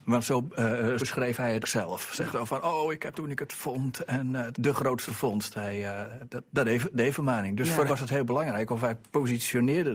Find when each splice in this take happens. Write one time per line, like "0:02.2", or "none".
0:01.0
0:01.6
0:02.3
0:03.1
0:04.5
0:05.1
0:06.5
0:06.9
0:07.9

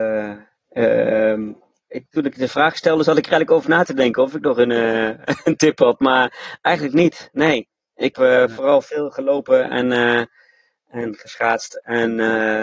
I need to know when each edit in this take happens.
0:08.1

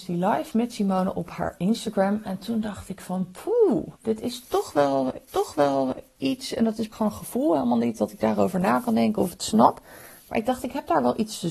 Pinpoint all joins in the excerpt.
0:04.0
0:05.3
0:06.9

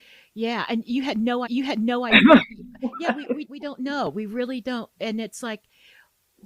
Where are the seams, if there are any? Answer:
0:01.5
0:03.4

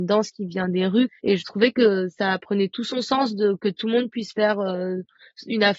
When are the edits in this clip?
0:01.2

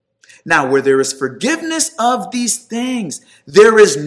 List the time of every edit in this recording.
none

